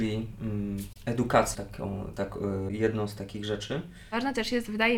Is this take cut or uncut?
cut